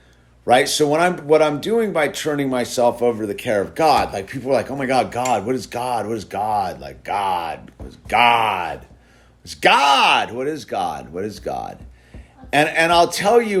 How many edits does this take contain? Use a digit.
0